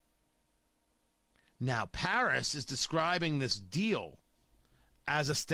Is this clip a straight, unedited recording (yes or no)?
yes